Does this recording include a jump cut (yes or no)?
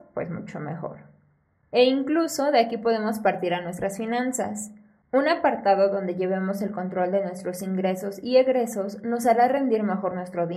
no